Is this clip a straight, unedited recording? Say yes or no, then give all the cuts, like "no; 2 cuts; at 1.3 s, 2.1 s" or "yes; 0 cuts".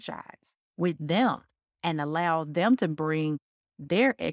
yes; 0 cuts